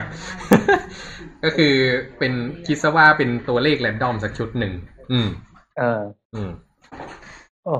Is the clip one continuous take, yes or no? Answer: yes